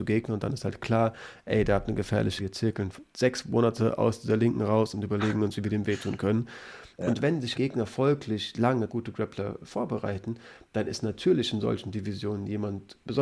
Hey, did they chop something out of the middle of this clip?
yes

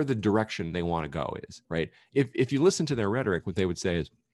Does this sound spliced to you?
yes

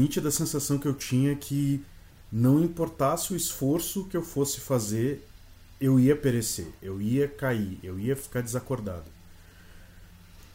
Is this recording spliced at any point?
no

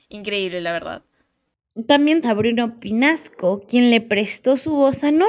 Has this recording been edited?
yes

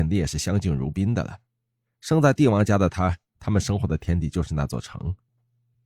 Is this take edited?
no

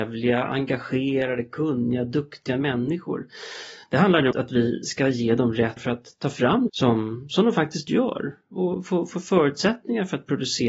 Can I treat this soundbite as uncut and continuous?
no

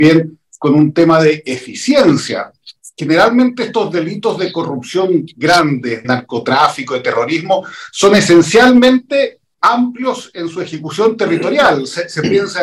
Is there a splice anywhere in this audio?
yes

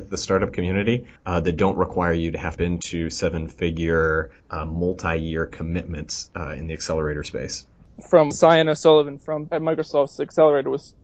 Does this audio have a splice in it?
yes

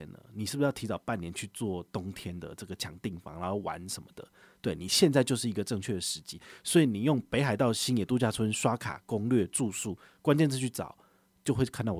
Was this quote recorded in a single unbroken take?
yes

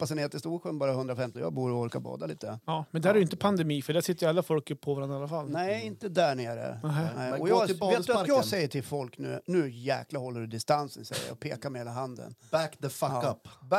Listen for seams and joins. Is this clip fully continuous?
no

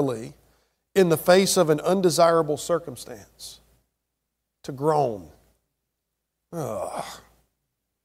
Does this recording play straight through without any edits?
yes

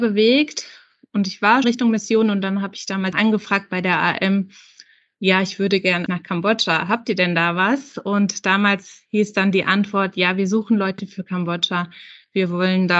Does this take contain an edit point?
yes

